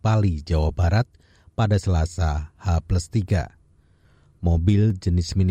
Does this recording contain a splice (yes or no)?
no